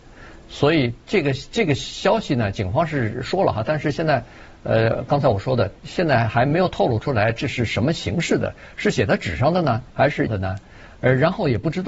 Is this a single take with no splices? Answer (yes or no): no